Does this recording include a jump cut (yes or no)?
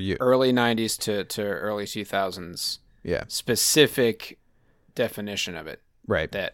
no